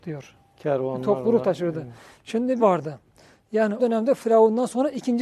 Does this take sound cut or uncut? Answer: cut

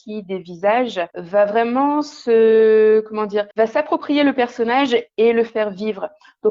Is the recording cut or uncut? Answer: cut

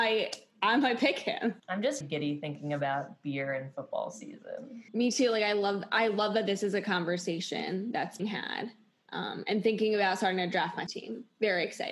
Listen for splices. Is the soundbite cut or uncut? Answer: cut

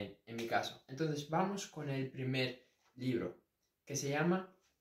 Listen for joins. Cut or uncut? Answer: uncut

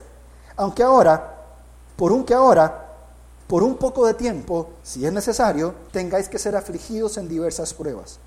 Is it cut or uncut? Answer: cut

